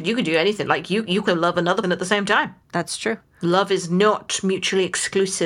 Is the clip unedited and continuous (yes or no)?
no